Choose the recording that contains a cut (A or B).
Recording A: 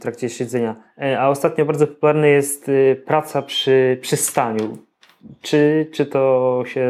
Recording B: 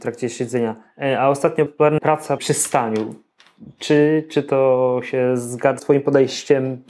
B